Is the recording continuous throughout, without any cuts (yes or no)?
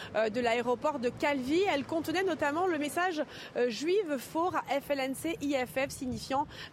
yes